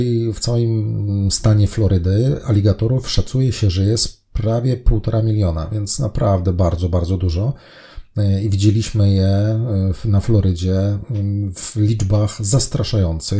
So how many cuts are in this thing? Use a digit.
0